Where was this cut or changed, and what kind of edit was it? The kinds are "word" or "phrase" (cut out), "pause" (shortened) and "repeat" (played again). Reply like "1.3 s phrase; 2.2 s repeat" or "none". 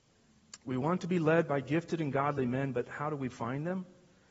none

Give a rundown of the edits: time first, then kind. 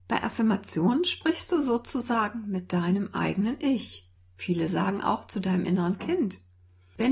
none

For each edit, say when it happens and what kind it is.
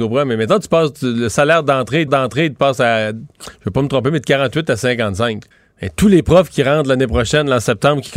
2.1 s repeat; 5.5 s pause

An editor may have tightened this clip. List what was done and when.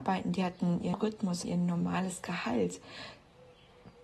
0.9 s word; 1.4 s word

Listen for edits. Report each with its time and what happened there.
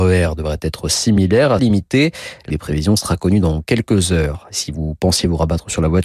1.6 s phrase; 2.5 s phrase

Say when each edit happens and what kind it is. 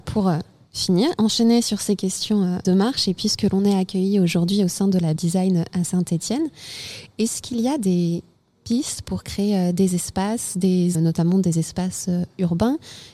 2.6 s word; 5.2 s phrase; 10.9 s word

